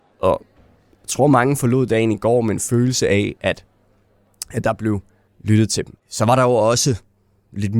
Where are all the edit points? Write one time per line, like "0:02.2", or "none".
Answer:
0:05.3
0:06.0